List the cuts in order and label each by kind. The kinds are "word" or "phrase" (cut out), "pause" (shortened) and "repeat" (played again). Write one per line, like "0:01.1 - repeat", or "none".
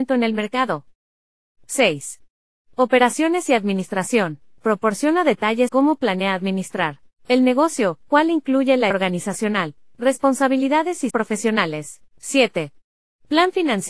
0:05.7 - word
0:07.1 - pause
0:08.1 - word
0:08.9 - word
0:11.1 - word
0:12.1 - pause